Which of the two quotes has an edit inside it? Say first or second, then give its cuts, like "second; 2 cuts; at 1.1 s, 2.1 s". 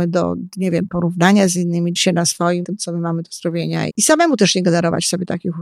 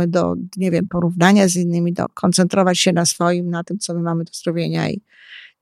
first; 3 cuts; at 2.0 s, 2.6 s, 3.9 s